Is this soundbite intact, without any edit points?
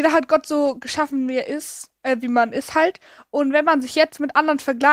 yes; 0 cuts

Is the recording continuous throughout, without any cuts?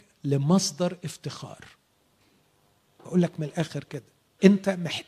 yes; 0 cuts

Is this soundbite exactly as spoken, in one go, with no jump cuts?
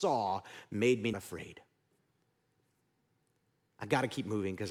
no; 1 cut; at 1.1 s

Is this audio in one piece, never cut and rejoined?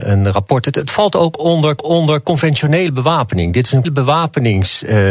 no; 2 cuts; at 1.8 s, 3.8 s

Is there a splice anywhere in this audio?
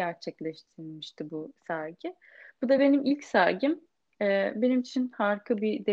no; 0 cuts

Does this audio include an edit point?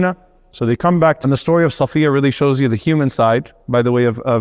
yes; 1 cut; at 1.2 s

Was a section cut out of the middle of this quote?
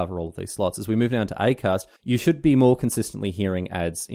yes; 1 cut; at 2.0 s

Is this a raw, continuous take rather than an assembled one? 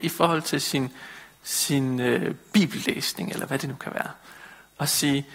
yes; 0 cuts

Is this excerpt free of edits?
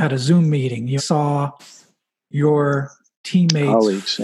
no; 1 cut; at 1.0 s

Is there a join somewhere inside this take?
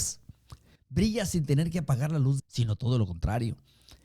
yes; 1 cut; at 2.4 s

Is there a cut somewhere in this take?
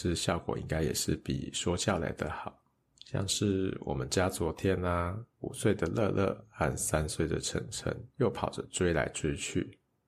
yes; 3 cuts; at 2.8 s, 5.3 s, 8.1 s

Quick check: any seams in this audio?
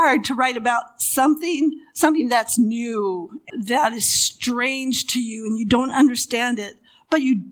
no; 0 cuts

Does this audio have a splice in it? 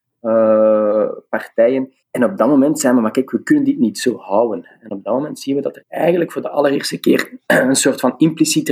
yes; 1 cut; at 2.0 s

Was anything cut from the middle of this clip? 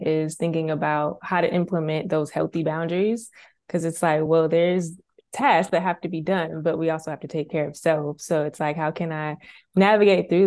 no; 0 cuts

